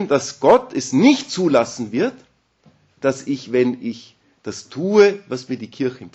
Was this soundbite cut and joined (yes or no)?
no